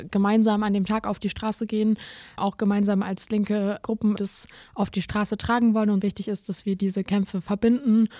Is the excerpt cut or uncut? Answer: cut